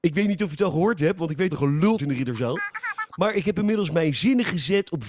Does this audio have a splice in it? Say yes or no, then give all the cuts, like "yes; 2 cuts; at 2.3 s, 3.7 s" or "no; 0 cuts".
yes; 2 cuts; at 1.5 s, 2.0 s